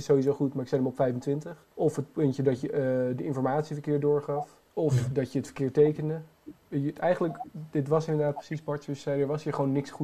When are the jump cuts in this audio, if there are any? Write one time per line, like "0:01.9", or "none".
0:01.7
0:04.7